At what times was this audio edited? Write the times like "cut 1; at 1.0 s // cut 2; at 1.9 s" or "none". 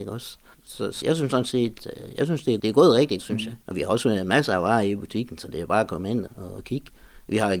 cut 1; at 1.0 s // cut 2; at 2.6 s // cut 3; at 3.2 s // cut 4; at 3.6 s // cut 5; at 6.3 s